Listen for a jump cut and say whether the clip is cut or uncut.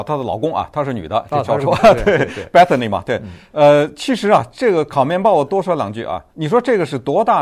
cut